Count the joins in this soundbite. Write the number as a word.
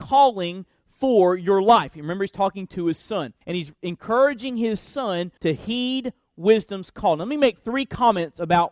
two